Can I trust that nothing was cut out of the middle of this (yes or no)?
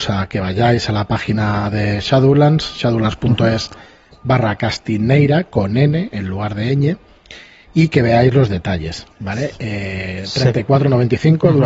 yes